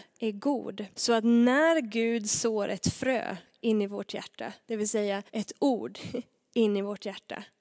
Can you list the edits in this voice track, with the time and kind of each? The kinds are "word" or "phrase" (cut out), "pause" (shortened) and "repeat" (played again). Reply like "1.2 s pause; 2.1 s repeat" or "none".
0.9 s pause; 5.3 s pause